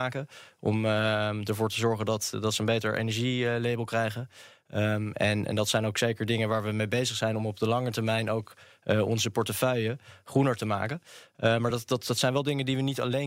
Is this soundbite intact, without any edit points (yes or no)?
yes